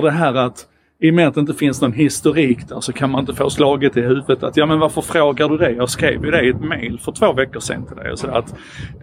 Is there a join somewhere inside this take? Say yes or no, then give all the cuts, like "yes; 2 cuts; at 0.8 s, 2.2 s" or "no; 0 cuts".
no; 0 cuts